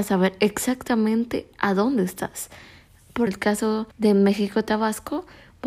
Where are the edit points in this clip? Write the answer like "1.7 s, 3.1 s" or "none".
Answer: 3.3 s, 3.9 s